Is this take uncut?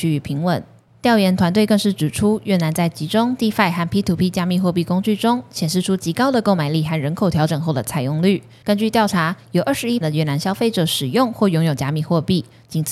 no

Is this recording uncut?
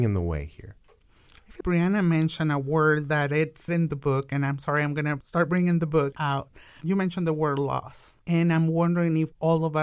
no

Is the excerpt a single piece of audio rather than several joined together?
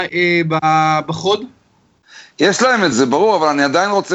no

